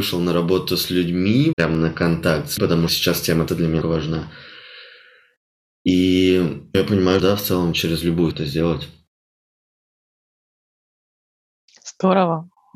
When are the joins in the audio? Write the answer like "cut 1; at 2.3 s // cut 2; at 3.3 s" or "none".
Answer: cut 1; at 1.5 s // cut 2; at 2.6 s // cut 3; at 2.9 s // cut 4; at 3.5 s // cut 5; at 3.8 s // cut 6; at 6.7 s // cut 7; at 7.2 s // cut 8; at 7.7 s // cut 9; at 8.3 s